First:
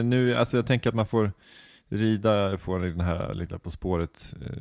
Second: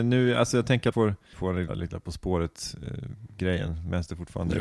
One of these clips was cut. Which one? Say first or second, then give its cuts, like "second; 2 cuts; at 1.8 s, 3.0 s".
second; 3 cuts; at 0.9 s, 1.3 s, 1.7 s